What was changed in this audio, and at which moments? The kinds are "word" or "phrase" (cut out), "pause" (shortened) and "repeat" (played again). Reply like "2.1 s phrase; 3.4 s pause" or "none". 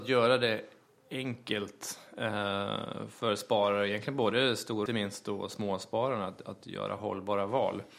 4.9 s phrase